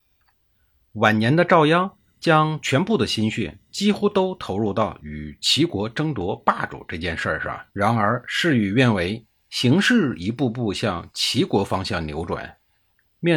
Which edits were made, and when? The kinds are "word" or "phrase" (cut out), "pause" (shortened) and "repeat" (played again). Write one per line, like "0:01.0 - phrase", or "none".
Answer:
0:07.7 - pause